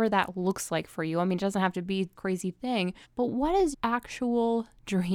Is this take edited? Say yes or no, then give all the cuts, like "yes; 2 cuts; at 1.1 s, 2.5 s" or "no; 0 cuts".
yes; 3 cuts; at 2.1 s, 3.0 s, 3.7 s